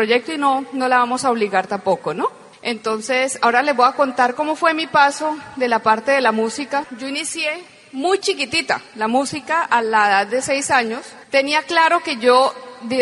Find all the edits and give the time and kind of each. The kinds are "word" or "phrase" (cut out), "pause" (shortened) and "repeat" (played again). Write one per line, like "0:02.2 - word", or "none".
0:02.5 - pause
0:08.9 - pause
0:11.2 - pause